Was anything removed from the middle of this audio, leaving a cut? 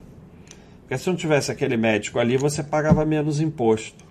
no; 0 cuts

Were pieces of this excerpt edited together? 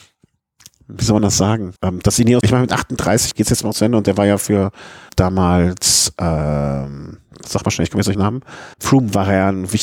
yes; 7 cuts; at 1.8 s, 2.4 s, 3.3 s, 5.1 s, 7.4 s, 8.1 s, 8.7 s

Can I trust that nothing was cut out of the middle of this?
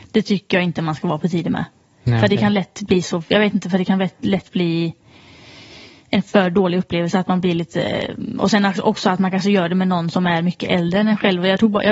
yes; 0 cuts

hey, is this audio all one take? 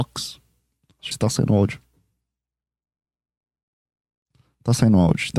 no; 1 cut; at 1.1 s

